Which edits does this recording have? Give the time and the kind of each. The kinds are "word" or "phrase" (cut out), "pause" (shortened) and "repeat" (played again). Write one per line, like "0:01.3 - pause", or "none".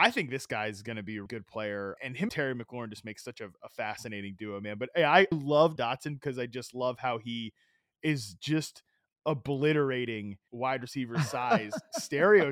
0:01.3 - word
0:02.0 - word
0:02.3 - word
0:05.3 - word
0:05.8 - word
0:10.5 - word